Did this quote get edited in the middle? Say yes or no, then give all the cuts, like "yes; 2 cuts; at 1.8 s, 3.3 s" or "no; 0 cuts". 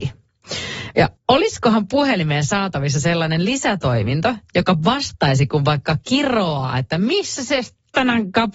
yes; 1 cut; at 1.2 s